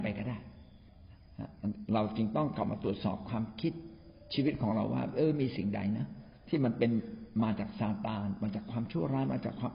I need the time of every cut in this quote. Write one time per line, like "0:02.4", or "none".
0:06.4

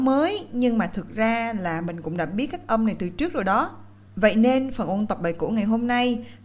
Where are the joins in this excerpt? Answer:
none

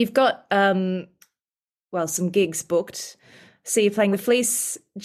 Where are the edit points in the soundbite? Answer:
none

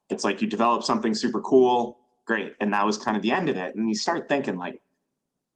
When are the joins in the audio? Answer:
none

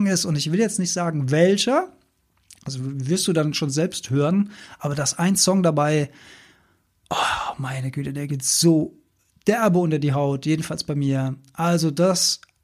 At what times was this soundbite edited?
none

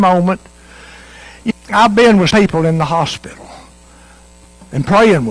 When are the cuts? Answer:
0:01.5
0:02.3

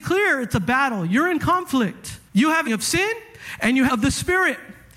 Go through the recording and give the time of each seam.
0:02.3
0:02.7
0:03.9

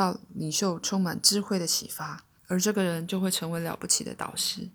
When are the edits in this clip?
0:02.4

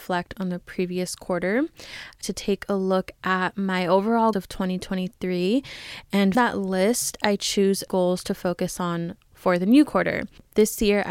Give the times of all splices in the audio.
0:02.2
0:04.3
0:06.3
0:07.9

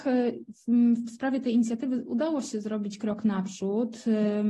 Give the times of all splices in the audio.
none

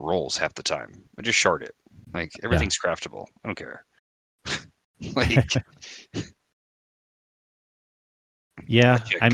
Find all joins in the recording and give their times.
0:01.1

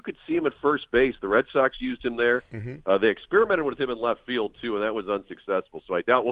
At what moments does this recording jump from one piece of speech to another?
none

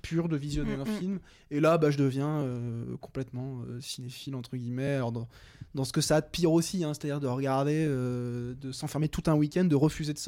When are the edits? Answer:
none

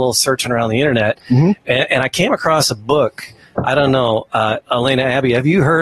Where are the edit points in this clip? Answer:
none

